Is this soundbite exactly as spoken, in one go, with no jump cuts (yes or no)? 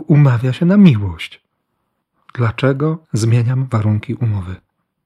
no